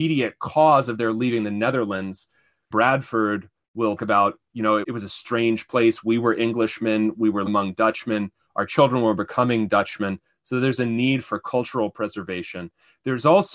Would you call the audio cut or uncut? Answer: cut